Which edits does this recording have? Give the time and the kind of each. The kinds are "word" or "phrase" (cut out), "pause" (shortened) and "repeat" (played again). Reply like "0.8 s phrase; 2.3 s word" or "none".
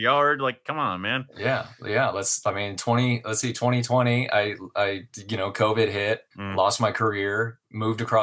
6.3 s pause